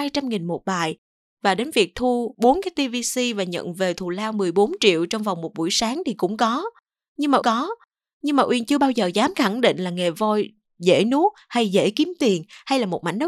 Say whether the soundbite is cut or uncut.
cut